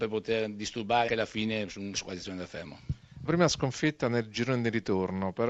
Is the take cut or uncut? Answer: cut